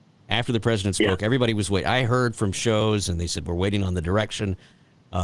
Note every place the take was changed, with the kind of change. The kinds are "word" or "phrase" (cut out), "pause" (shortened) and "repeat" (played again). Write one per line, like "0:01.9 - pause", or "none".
none